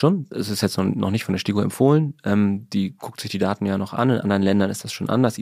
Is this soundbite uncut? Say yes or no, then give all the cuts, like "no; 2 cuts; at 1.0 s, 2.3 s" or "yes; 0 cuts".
yes; 0 cuts